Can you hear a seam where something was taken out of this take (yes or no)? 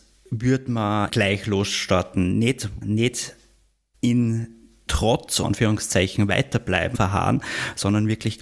yes